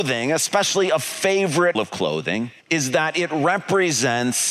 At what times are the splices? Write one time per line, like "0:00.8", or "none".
0:01.8
0:02.6

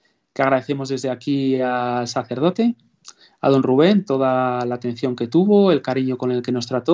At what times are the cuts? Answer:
none

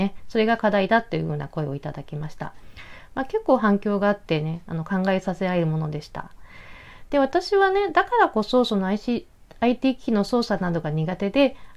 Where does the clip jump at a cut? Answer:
none

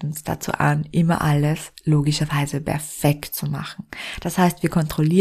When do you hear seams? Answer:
none

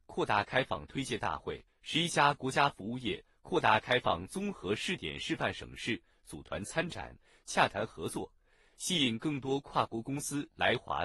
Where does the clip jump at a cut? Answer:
0:01.7

